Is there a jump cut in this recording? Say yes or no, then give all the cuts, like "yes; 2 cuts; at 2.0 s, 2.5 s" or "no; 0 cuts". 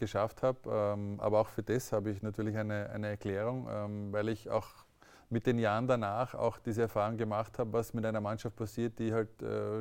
no; 0 cuts